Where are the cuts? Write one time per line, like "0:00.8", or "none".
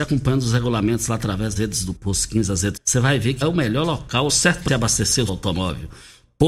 0:01.6
0:02.0
0:02.8
0:03.4
0:04.3
0:04.7
0:05.3